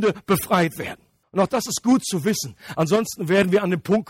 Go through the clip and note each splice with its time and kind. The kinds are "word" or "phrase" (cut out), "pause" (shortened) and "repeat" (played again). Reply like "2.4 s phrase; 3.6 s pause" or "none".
1.2 s pause